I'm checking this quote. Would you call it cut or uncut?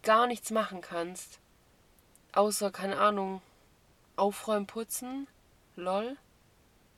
uncut